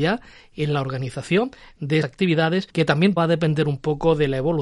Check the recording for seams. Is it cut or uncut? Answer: cut